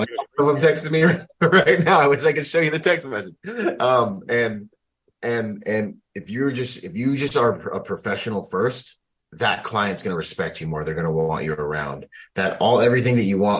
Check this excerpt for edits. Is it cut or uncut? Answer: cut